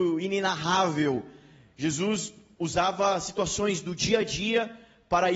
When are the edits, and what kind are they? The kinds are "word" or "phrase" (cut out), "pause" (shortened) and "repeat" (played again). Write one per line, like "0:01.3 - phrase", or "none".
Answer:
none